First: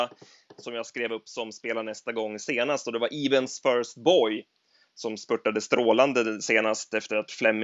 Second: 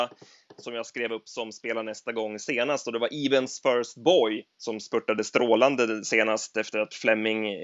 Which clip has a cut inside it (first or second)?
second